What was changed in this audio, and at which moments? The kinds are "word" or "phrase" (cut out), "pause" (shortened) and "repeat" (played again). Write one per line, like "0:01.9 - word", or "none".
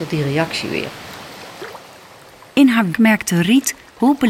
0:02.9 - word